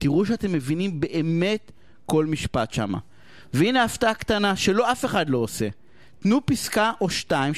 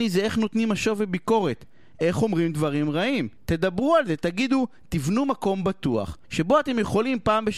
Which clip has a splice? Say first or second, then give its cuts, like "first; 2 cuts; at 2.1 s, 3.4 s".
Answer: second; 2 cuts; at 3.4 s, 6.2 s